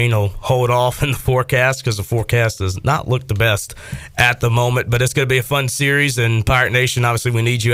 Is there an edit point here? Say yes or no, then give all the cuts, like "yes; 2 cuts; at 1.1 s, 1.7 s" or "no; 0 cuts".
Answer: no; 0 cuts